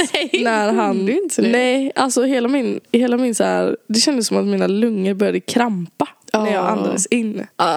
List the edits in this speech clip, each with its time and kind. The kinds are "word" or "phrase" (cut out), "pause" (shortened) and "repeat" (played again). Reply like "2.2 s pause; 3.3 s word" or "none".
2.8 s pause